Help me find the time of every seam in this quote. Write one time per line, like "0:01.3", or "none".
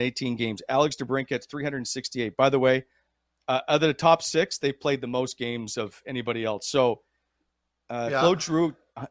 none

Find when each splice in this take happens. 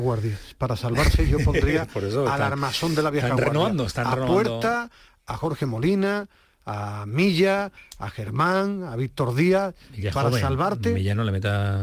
none

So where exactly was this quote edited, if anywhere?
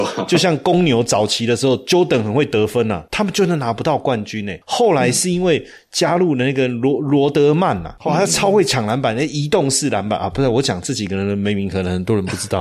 none

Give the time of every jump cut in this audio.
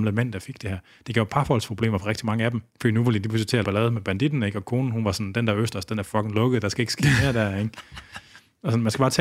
0:02.7
0:03.6

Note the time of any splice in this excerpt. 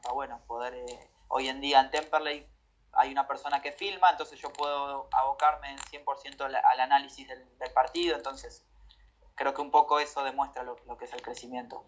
none

